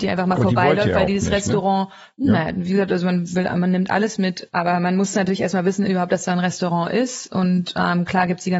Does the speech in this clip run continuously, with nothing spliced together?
yes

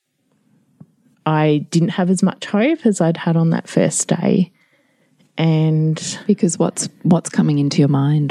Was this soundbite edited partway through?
no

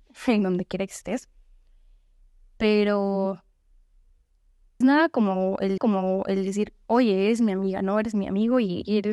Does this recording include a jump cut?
yes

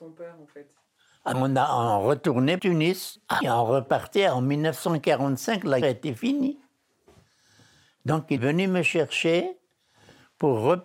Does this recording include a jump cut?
yes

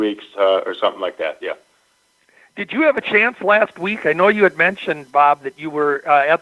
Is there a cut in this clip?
no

